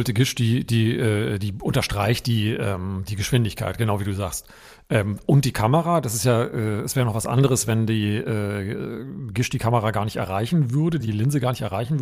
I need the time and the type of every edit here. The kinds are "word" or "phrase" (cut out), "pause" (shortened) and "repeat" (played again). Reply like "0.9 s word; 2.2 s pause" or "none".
none